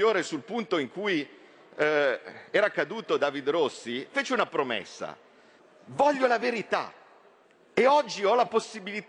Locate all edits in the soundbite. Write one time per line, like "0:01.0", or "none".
0:02.5
0:05.6
0:07.4